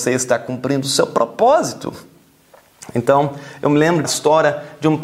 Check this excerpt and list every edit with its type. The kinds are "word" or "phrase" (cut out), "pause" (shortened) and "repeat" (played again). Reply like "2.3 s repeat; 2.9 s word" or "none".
4.0 s phrase